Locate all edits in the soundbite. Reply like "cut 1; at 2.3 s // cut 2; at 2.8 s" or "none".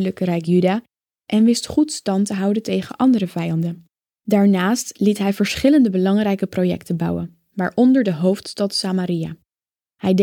none